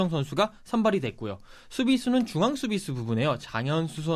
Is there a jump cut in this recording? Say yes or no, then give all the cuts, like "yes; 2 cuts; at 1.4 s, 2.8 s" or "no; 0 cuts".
no; 0 cuts